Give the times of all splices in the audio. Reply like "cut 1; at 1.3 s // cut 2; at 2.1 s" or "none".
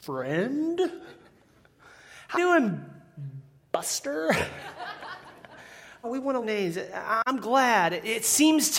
cut 1; at 2.3 s // cut 2; at 6.0 s // cut 3; at 6.4 s